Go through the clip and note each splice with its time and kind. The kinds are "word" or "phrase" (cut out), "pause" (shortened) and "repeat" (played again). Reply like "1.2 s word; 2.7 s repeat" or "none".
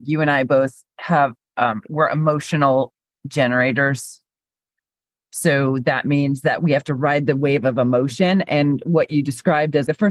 none